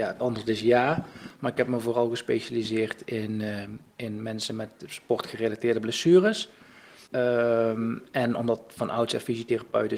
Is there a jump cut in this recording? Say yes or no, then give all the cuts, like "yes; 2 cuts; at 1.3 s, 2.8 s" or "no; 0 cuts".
yes; 1 cut; at 7.1 s